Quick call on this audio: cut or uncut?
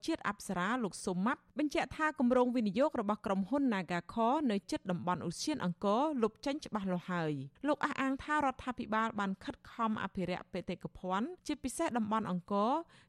cut